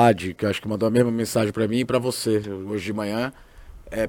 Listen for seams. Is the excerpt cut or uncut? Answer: uncut